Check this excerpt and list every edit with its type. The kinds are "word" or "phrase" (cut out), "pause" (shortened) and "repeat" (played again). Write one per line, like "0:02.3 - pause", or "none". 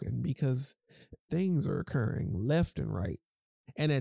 0:01.3 - word